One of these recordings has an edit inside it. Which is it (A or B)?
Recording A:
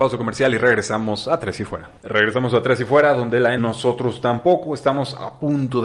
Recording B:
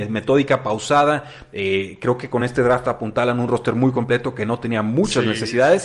A